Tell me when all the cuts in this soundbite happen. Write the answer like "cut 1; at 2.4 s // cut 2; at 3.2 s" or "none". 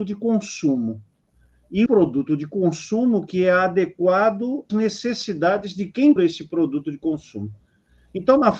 cut 1; at 1.9 s // cut 2; at 4.7 s // cut 3; at 6.2 s

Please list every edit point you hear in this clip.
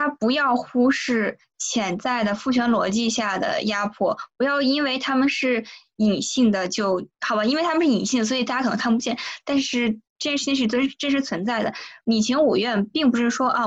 cut 1; at 7.1 s // cut 2; at 10.1 s

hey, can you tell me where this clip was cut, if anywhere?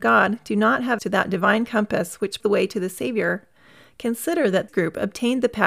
cut 1; at 1.0 s // cut 2; at 2.4 s // cut 3; at 4.7 s

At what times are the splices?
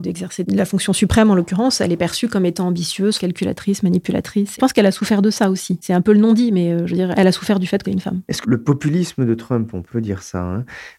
cut 1; at 3.2 s // cut 2; at 4.6 s // cut 3; at 7.8 s // cut 4; at 8.4 s // cut 5; at 9.9 s

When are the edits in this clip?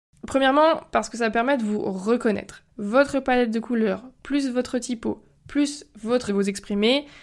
cut 1; at 2.7 s // cut 2; at 6.3 s

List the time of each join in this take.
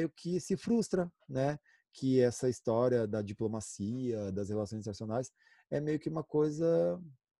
none

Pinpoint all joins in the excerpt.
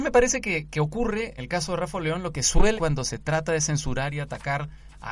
cut 1; at 1.4 s // cut 2; at 2.8 s

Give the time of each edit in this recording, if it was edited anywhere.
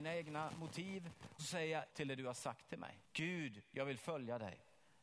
cut 1; at 1.4 s // cut 2; at 1.9 s // cut 3; at 3.0 s

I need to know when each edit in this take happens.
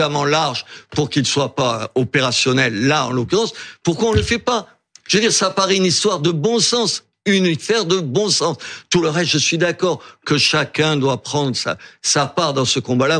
none

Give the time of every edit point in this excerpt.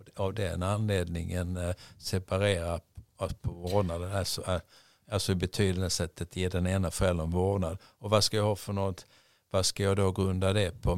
none

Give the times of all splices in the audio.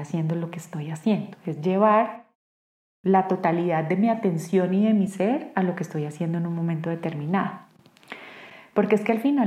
none

